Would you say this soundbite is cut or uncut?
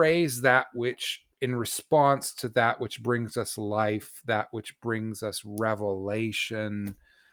cut